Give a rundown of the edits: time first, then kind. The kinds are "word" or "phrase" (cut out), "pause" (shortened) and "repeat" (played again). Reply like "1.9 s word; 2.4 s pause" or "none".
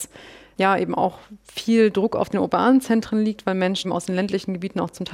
3.8 s word